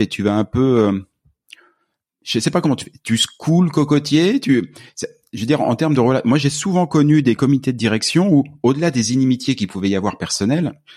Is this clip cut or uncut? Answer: uncut